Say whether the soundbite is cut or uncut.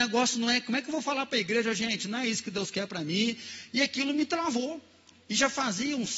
uncut